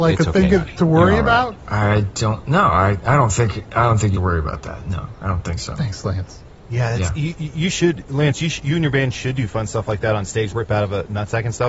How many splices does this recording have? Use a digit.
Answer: 2